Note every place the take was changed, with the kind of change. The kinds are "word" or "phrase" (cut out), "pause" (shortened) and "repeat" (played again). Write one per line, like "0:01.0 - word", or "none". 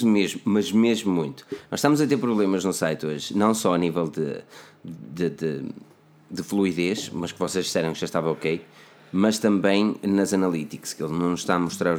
none